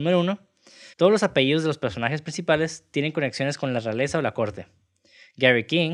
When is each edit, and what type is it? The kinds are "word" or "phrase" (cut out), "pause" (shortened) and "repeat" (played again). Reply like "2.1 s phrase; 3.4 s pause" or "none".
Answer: 0.9 s pause

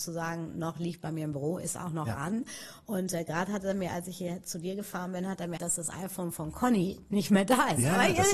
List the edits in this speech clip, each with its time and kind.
5.6 s word

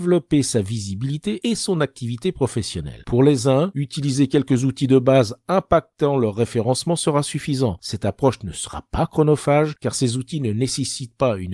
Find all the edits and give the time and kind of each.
none

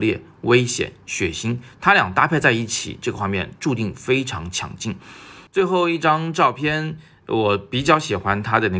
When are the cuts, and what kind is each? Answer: 5.5 s pause

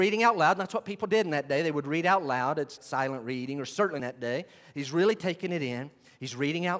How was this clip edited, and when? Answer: 2.8 s phrase; 4.0 s phrase

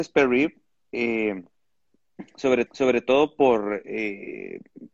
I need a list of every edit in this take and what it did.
2.7 s repeat

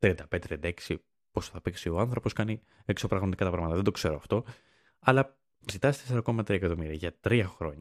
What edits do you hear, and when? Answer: 5.7 s word

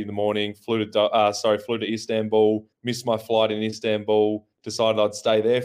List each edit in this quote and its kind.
2.7 s pause; 4.5 s pause

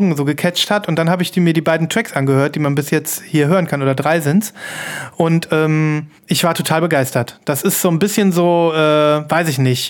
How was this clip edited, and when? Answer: 6.2 s pause

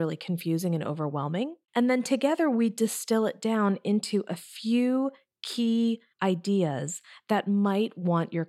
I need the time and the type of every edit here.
1.6 s pause; 6.1 s pause

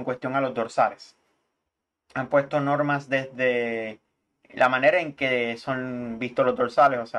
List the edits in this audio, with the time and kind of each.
none

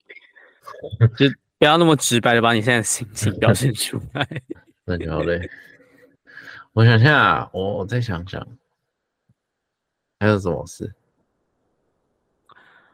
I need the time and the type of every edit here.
none

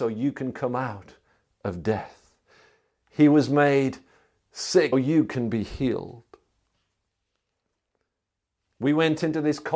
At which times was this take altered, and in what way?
4.9 s word

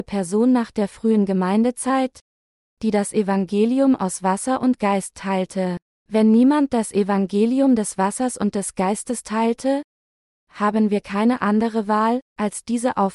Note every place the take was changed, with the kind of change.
5.9 s pause

